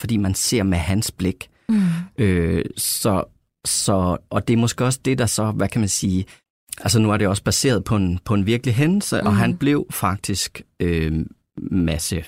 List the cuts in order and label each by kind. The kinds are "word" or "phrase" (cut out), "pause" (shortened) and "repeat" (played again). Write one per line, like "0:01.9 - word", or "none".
none